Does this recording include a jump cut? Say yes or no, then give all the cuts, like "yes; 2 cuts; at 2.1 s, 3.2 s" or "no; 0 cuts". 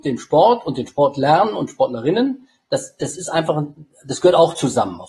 no; 0 cuts